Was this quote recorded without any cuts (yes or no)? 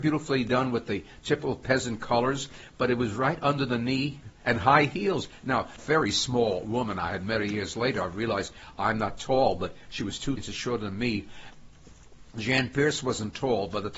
no